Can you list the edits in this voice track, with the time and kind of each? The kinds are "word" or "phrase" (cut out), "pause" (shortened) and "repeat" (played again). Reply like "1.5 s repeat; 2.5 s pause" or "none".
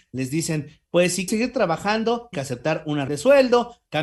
1.3 s word; 2.3 s word; 3.1 s word